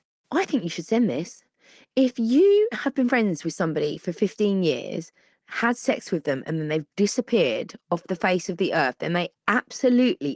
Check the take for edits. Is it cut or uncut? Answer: uncut